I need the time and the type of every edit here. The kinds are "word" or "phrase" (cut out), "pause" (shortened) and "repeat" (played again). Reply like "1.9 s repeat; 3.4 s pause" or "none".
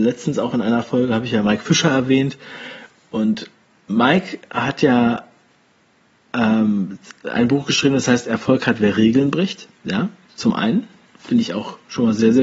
none